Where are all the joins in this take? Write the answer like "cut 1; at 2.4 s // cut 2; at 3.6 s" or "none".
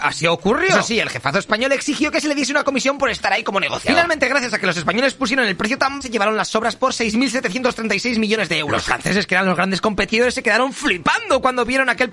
cut 1; at 6.0 s